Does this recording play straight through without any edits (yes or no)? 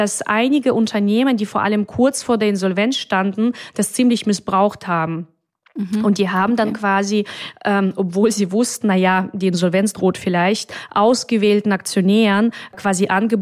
yes